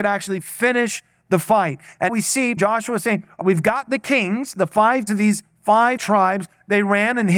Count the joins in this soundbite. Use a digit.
5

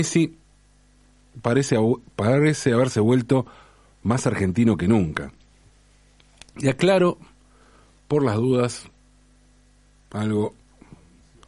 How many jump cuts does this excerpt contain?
0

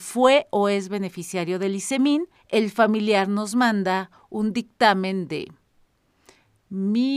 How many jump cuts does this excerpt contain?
1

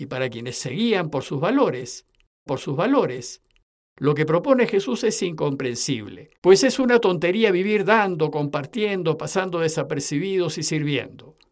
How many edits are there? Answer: 2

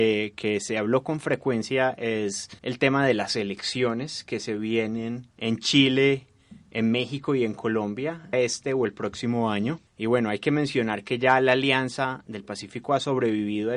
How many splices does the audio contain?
4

